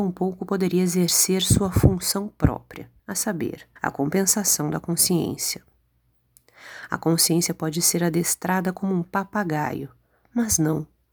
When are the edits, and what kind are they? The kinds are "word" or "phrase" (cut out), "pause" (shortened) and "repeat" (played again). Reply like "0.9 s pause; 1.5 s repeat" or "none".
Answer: 3.0 s pause; 3.8 s pause